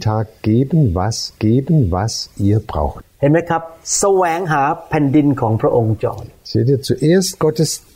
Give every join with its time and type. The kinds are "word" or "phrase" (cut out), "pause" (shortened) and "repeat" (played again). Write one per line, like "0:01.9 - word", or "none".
0:01.4 - repeat